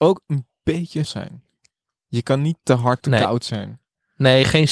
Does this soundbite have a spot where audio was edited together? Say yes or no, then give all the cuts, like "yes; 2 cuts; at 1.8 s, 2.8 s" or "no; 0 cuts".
yes; 3 cuts; at 1.0 s, 2.6 s, 3.0 s